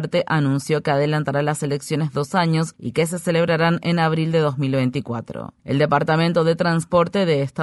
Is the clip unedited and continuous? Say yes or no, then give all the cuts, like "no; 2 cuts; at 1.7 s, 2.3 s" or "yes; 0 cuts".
yes; 0 cuts